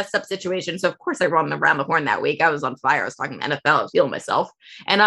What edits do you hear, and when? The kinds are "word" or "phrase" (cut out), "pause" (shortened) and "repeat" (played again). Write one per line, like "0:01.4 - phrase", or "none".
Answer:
0:03.9 - word